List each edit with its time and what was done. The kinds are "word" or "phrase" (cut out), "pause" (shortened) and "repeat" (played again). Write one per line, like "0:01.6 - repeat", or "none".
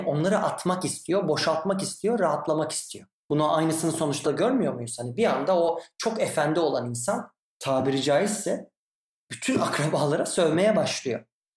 0:04.2 - word